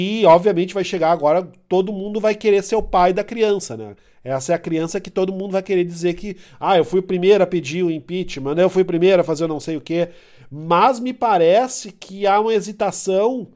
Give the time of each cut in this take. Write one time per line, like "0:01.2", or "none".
none